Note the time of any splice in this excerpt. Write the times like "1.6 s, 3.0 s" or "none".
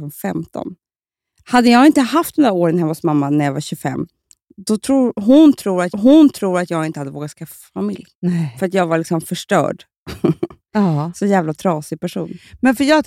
5.9 s, 8.1 s